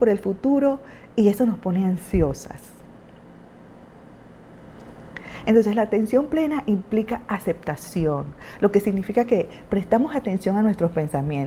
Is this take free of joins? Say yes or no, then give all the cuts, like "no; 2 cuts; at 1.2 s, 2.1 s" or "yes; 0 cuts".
yes; 0 cuts